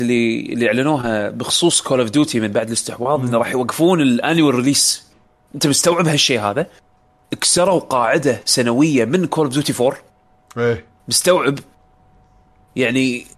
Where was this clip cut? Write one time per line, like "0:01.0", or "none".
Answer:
0:11.0